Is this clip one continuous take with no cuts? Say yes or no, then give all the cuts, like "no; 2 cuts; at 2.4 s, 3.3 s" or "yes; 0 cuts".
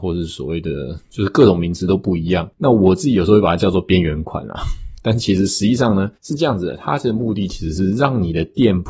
no; 1 cut; at 6.2 s